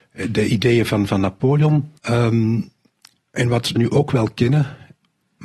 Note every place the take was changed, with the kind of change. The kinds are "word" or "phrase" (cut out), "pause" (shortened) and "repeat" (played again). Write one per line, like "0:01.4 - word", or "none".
0:02.0 - pause
0:03.8 - phrase